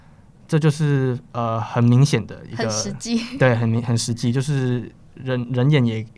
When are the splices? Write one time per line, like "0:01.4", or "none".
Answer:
none